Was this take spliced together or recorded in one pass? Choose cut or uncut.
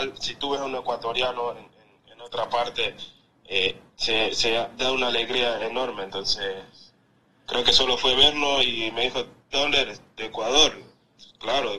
uncut